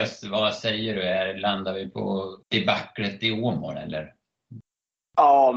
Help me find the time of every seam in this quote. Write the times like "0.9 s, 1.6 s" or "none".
2.4 s